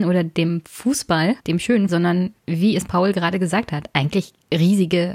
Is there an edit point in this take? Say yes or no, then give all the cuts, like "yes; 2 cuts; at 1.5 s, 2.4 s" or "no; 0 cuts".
yes; 3 cuts; at 1.4 s, 1.9 s, 2.4 s